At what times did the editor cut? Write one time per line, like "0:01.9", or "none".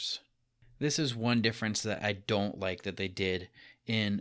none